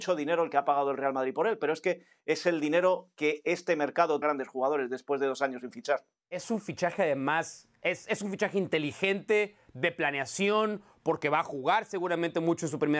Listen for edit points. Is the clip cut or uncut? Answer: cut